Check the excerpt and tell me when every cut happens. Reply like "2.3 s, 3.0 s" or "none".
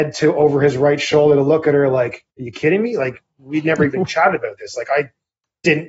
2.3 s